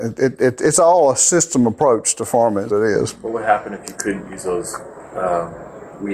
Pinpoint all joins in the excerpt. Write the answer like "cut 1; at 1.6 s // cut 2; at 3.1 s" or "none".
cut 1; at 2.7 s